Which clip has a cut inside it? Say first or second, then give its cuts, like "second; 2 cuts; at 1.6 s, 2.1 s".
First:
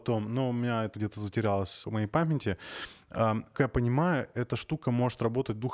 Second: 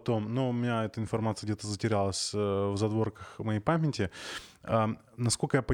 first; 3 cuts; at 0.9 s, 1.8 s, 3.6 s